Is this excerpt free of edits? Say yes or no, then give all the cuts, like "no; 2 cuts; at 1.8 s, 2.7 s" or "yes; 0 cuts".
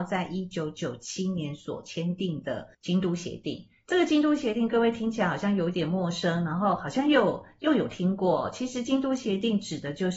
no; 1 cut; at 2.7 s